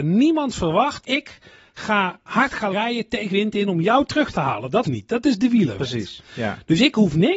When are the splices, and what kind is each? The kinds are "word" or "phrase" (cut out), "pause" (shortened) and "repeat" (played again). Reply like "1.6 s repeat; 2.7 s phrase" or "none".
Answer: 1.0 s word; 2.7 s word; 3.3 s word; 4.8 s word